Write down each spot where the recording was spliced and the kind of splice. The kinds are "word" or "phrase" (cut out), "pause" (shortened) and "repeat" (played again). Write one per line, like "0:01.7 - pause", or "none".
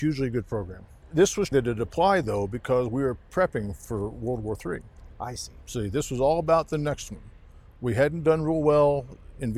0:01.5 - word